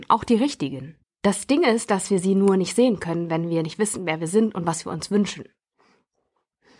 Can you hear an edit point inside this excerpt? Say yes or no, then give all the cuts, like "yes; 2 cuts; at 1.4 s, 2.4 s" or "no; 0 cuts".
yes; 1 cut; at 1.0 s